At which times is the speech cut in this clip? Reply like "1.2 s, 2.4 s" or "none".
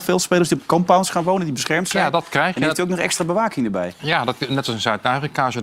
none

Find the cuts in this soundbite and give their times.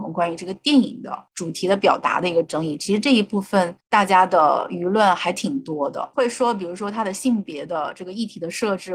1.3 s, 3.8 s

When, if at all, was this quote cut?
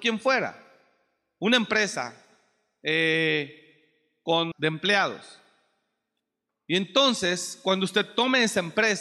4.5 s

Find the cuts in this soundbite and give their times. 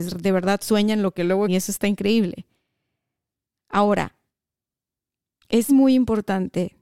1.5 s, 5.7 s

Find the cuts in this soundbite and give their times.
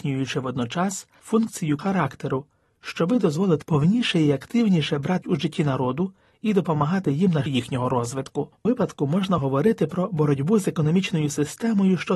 1.8 s, 3.6 s, 5.2 s, 7.5 s, 8.6 s, 9.4 s

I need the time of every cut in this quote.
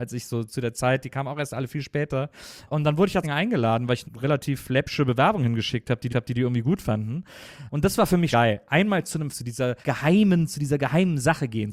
3.2 s, 4.0 s, 6.1 s, 8.3 s, 9.3 s, 9.8 s

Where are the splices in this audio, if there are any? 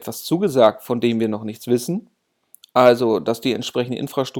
none

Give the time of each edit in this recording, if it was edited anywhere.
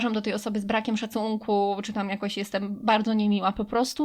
none

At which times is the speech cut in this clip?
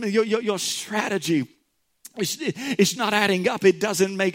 2.9 s

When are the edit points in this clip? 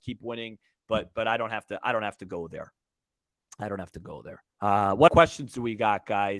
4.5 s, 5.1 s

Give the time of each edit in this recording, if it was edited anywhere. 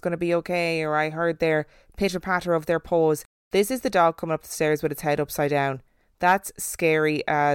none

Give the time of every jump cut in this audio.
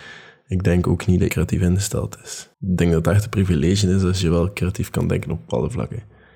1.3 s, 2.5 s

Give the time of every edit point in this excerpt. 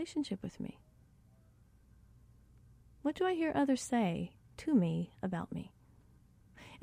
none

